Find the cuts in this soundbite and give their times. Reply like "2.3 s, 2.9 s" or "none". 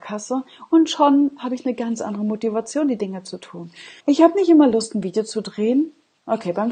4.0 s